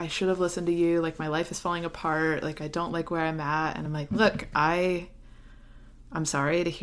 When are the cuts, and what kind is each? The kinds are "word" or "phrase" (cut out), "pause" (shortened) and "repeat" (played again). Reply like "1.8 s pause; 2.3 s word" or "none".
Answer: none